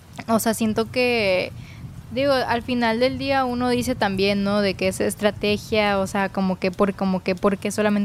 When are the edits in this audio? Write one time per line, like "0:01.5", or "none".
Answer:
0:06.9